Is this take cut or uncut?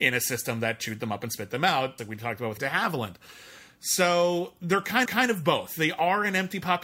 cut